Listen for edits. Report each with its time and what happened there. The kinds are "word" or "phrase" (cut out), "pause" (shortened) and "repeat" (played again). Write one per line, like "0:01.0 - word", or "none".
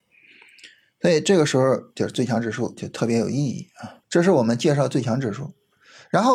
0:04.0 - pause

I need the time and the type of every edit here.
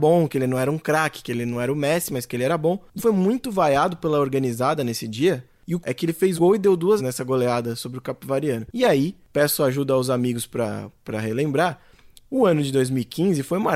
0:03.0 - word
0:05.8 - word
0:06.4 - word
0:07.0 - word

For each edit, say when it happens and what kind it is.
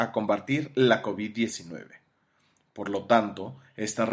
none

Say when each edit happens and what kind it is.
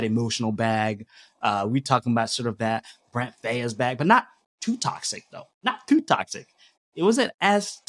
none

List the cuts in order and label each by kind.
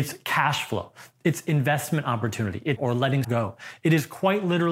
0:02.8 - word
0:03.2 - word

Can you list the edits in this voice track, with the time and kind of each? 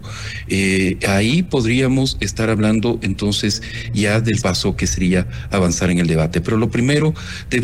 0:04.4 - word

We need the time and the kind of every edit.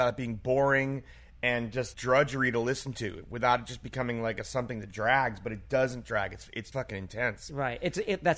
0:01.9 - word
0:06.7 - word

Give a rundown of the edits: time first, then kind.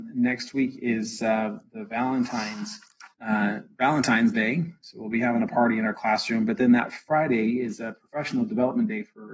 0:03.1 - pause

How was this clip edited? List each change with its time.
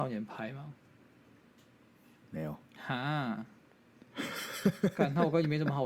0:02.7 - pause

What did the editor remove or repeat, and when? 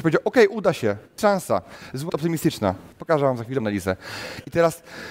0:01.2 - word
0:02.1 - phrase
0:02.9 - pause
0:03.6 - word

